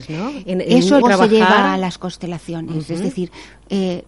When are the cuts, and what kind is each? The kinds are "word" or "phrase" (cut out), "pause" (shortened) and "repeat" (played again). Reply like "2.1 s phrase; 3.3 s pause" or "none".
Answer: 1.0 s word